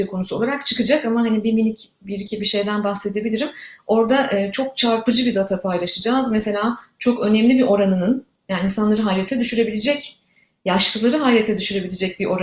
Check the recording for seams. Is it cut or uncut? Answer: uncut